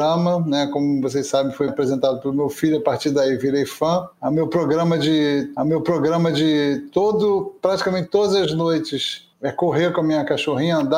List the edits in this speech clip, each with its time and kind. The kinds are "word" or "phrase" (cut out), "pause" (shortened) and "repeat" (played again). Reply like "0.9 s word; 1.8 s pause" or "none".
1.7 s word; 5.6 s repeat; 9.3 s pause